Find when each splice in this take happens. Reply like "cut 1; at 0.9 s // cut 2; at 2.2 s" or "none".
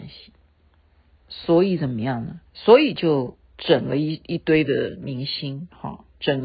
cut 1; at 2.5 s